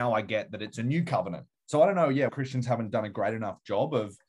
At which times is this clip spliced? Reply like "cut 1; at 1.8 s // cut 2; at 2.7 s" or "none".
cut 1; at 1.5 s // cut 2; at 2.3 s